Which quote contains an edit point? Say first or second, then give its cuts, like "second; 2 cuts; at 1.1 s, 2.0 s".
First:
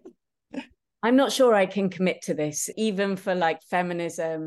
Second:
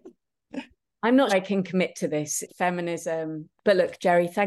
second; 2 cuts; at 1.3 s, 2.5 s